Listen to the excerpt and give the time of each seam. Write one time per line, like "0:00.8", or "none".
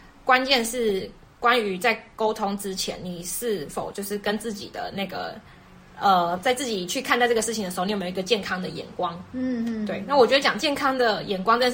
none